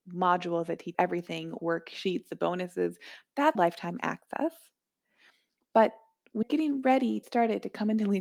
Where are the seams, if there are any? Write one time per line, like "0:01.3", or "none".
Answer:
0:00.9
0:01.6
0:03.6
0:06.4
0:07.2